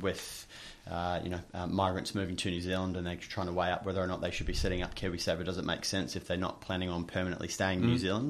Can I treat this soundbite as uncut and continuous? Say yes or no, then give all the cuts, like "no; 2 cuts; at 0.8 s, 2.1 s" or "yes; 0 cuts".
yes; 0 cuts